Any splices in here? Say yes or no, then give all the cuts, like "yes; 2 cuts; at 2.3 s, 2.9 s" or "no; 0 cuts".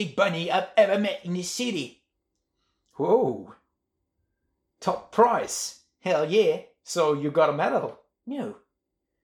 no; 0 cuts